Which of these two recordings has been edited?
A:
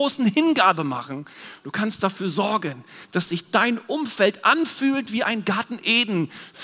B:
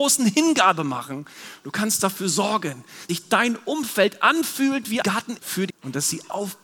B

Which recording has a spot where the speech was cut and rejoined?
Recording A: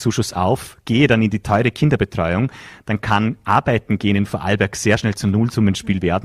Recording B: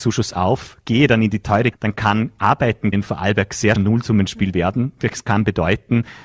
B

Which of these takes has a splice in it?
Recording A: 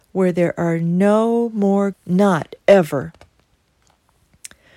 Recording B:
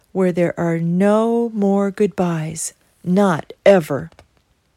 A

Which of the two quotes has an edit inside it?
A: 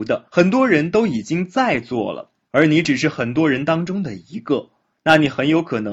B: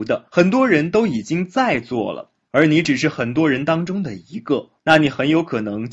B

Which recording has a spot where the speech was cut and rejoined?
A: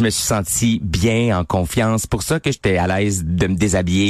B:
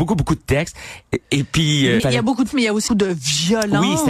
B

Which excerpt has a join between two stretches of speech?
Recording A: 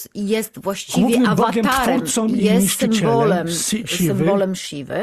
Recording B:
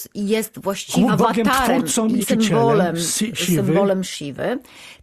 B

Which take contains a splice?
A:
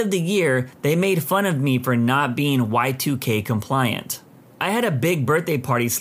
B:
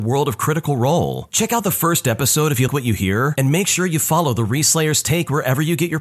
B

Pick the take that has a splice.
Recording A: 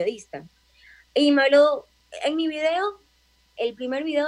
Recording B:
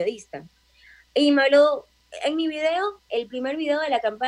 B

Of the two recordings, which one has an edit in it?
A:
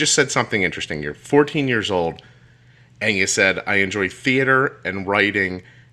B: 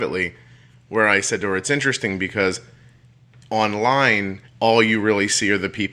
B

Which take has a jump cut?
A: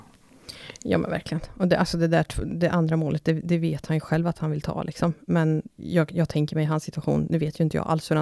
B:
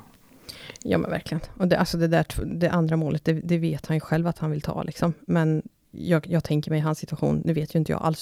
A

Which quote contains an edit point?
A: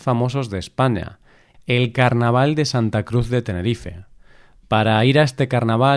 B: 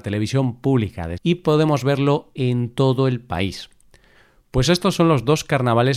B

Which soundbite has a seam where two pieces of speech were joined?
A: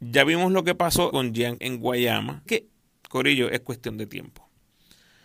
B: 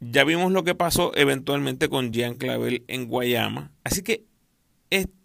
A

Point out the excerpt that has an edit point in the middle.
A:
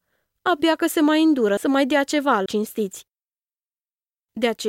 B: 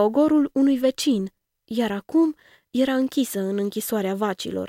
A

